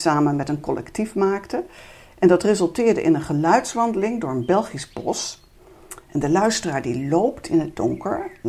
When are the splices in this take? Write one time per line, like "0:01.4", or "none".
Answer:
none